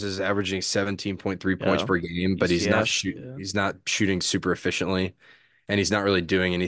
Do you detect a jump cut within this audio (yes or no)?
no